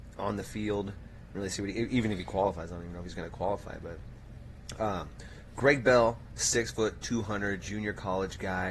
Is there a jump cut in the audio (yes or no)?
no